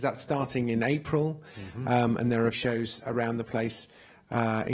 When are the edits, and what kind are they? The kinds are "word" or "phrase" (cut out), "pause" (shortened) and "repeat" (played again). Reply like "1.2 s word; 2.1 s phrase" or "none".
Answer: 2.5 s word; 3.0 s word